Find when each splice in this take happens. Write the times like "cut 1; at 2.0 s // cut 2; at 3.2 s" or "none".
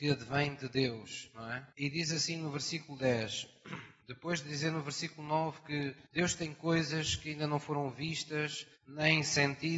cut 1; at 1.7 s // cut 2; at 4.0 s // cut 3; at 6.1 s // cut 4; at 8.8 s